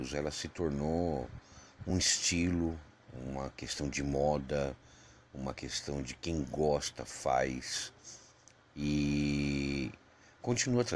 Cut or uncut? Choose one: uncut